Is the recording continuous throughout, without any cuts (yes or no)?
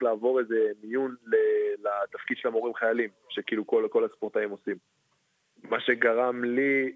yes